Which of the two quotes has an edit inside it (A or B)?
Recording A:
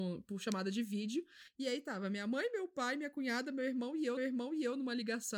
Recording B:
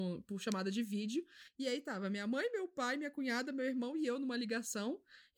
A